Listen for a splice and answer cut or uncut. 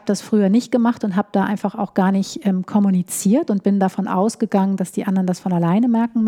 uncut